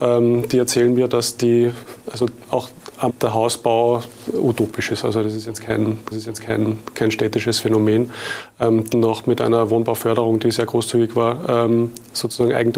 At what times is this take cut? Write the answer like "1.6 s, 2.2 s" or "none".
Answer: 2.0 s, 3.1 s, 6.1 s, 8.9 s